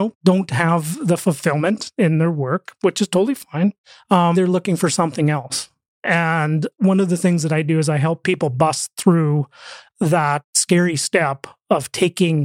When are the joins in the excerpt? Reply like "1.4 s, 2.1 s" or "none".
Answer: 4.3 s

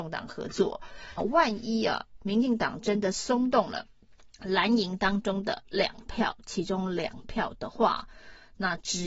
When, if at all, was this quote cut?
1.2 s, 4.3 s

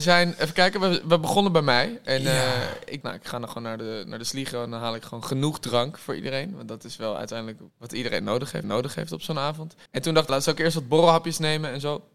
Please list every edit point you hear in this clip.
3.0 s, 7.7 s, 8.6 s, 9.9 s, 10.3 s

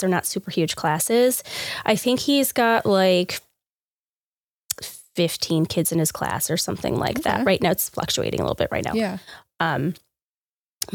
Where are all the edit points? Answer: none

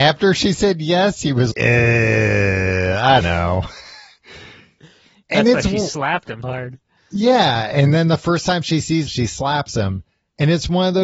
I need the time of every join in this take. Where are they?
1.5 s, 3.2 s, 6.4 s, 9.1 s

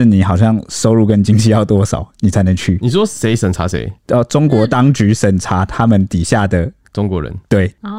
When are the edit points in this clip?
4.0 s

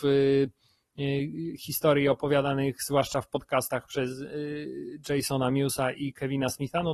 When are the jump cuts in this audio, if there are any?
none

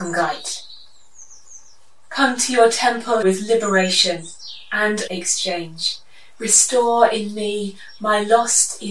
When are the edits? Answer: 3.2 s, 5.1 s

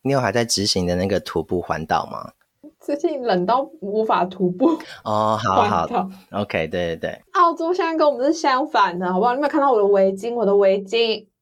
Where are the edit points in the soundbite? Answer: 7.3 s

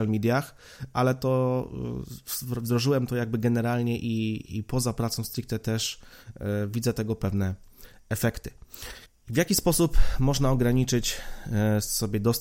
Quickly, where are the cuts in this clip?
9.1 s

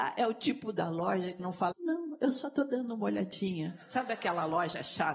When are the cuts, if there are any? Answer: 1.4 s, 1.7 s

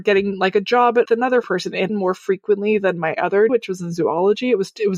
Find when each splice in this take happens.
1.1 s, 1.4 s, 1.9 s, 3.5 s

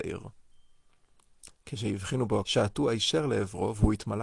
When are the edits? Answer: 2.4 s

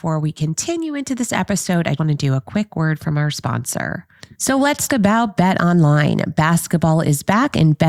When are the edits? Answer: 2.0 s, 4.3 s, 4.9 s

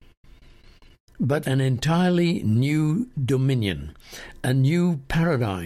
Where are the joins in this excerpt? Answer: 1.4 s

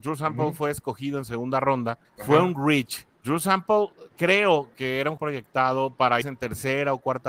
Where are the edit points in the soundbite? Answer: 2.0 s, 3.1 s, 5.2 s, 6.2 s

